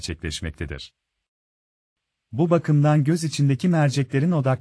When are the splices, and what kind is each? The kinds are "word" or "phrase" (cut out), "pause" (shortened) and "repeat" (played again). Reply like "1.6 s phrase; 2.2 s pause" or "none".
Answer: none